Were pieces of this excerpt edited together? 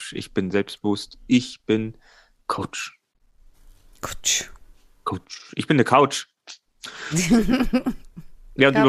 no; 0 cuts

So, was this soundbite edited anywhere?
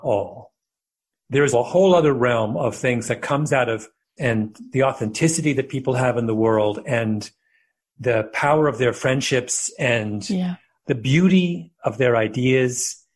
yes; 2 cuts; at 1.5 s, 4.2 s

